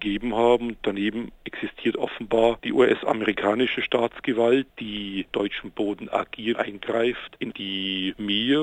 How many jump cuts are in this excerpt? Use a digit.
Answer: 4